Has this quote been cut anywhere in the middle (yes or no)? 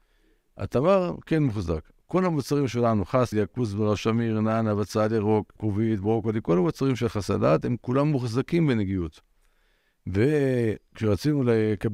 yes